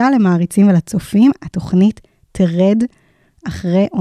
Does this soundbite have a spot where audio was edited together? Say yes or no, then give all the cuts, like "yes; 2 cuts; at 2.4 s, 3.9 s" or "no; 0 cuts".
no; 0 cuts